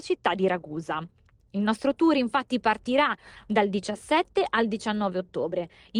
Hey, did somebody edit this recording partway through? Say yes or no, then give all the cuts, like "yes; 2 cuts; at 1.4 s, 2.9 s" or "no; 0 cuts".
no; 0 cuts